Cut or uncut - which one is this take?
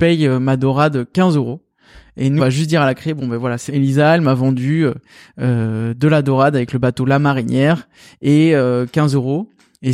cut